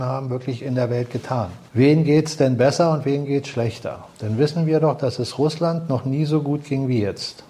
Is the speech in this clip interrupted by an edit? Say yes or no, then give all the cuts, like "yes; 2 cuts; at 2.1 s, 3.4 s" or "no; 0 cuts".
yes; 1 cut; at 1.7 s